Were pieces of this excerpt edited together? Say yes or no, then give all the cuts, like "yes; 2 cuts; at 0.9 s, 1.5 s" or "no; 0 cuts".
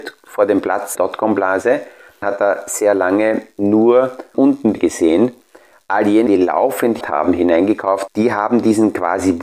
yes; 7 cuts; at 0.9 s, 2.2 s, 4.3 s, 4.8 s, 6.3 s, 7.0 s, 8.1 s